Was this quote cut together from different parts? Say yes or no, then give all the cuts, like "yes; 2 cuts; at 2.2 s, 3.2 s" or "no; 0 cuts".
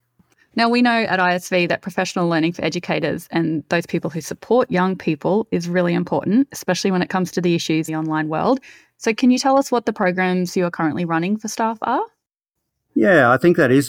yes; 1 cut; at 7.9 s